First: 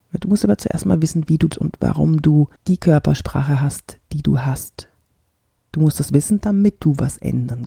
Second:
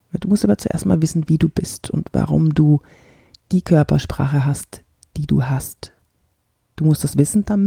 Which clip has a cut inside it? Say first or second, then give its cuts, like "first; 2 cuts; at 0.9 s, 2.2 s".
first; 3 cuts; at 1.5 s, 2.6 s, 4.0 s